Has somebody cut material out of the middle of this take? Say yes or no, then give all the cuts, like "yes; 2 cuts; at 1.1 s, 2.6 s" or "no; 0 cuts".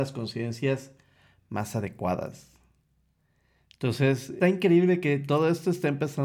yes; 1 cut; at 4.4 s